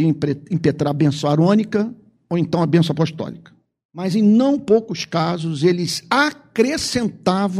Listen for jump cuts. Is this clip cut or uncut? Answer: uncut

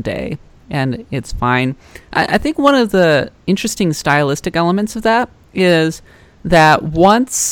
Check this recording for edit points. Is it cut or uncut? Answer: cut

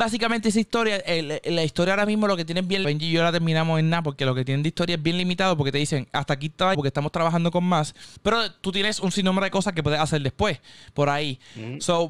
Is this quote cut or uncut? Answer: cut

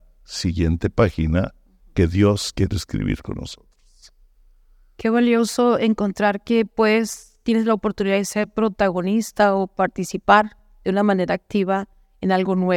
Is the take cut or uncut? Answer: uncut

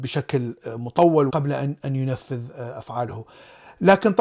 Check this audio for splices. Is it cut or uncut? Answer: cut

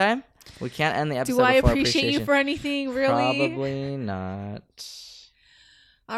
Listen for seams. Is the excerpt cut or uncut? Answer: uncut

